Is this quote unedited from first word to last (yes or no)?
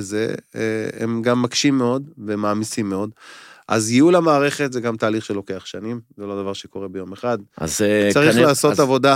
yes